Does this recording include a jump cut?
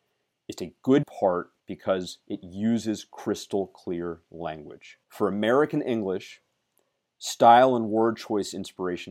yes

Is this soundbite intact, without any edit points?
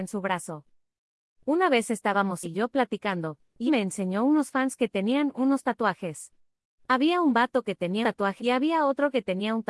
no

